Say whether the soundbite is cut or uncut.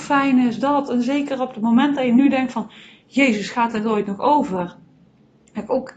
uncut